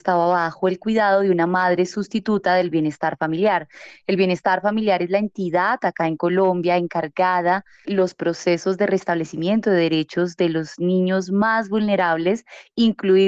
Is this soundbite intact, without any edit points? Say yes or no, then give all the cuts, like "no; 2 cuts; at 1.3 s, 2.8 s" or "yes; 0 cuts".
no; 1 cut; at 7.8 s